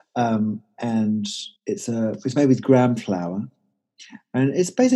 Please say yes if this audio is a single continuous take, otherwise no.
no